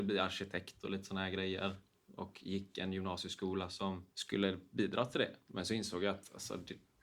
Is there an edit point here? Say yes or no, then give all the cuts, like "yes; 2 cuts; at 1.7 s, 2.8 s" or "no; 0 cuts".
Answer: yes; 1 cut; at 4.1 s